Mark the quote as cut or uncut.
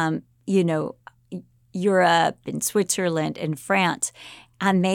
uncut